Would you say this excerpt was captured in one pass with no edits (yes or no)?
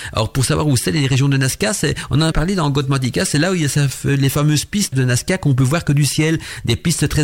no